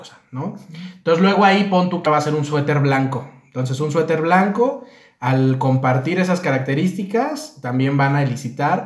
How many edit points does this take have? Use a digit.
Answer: 1